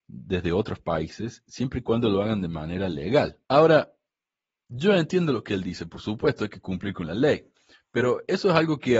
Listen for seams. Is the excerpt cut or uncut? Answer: cut